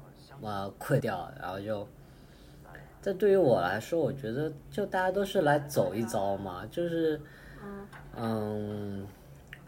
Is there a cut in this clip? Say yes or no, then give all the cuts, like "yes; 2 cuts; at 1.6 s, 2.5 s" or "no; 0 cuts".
yes; 1 cut; at 1.0 s